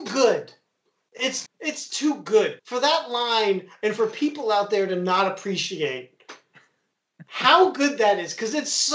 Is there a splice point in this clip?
yes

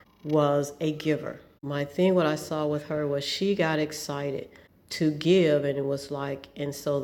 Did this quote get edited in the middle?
no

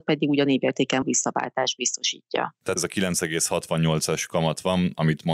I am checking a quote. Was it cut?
yes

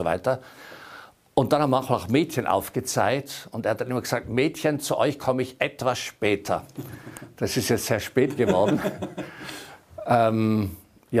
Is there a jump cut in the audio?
no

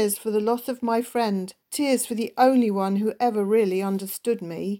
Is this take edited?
yes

